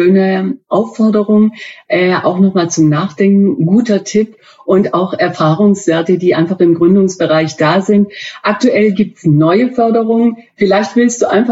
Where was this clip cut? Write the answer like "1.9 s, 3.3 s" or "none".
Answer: none